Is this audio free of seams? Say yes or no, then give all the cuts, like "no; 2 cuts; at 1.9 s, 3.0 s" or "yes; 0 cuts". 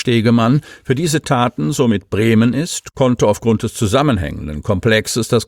yes; 0 cuts